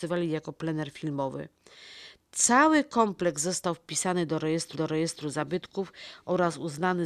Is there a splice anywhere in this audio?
yes; 1 cut; at 4.7 s

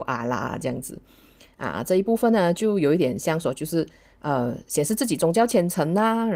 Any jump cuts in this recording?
no; 0 cuts

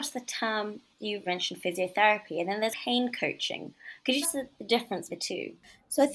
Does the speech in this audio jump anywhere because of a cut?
yes; 4 cuts; at 1.3 s, 2.7 s, 4.2 s, 5.1 s

